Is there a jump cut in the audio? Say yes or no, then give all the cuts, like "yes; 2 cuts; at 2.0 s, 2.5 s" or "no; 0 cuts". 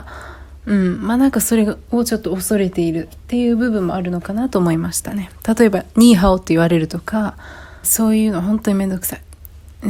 yes; 1 cut; at 7.8 s